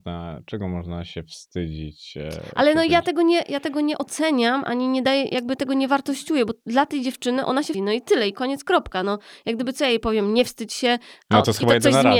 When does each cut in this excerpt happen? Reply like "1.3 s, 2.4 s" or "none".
7.7 s

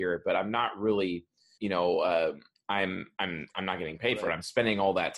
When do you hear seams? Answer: 1.6 s, 2.6 s

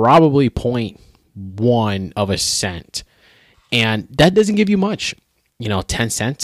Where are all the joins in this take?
none

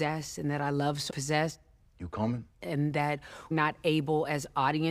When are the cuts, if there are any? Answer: 1.1 s, 2.5 s, 3.5 s

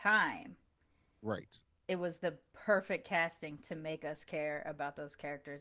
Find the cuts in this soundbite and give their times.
none

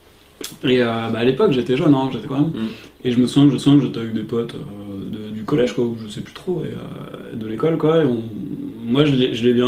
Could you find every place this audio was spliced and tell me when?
2.2 s, 3.6 s, 5.0 s

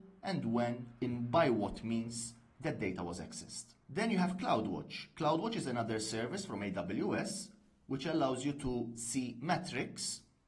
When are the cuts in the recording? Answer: none

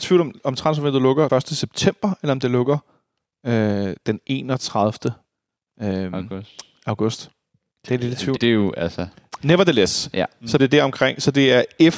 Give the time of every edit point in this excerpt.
1.3 s, 8.4 s, 10.6 s

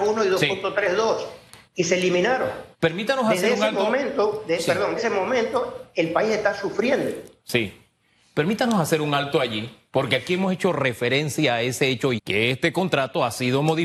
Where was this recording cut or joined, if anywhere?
1.6 s, 2.7 s, 5.0 s, 12.2 s

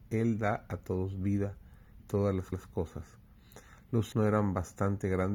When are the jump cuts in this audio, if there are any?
2.0 s, 2.5 s, 4.1 s

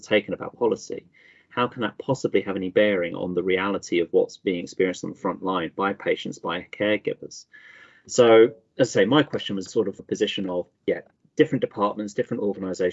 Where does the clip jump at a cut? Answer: 9.7 s, 10.0 s, 10.8 s

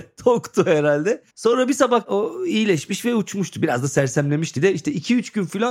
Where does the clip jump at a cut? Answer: 1.3 s, 2.0 s, 4.6 s

